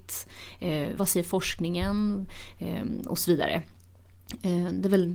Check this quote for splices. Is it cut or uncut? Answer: cut